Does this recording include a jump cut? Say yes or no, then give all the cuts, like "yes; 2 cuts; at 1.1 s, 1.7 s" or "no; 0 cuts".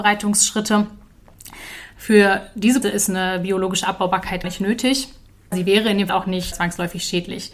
yes; 5 cuts; at 2.8 s, 4.4 s, 5.5 s, 6.1 s, 6.5 s